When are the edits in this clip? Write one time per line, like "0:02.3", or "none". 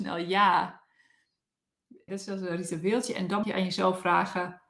0:02.1
0:03.4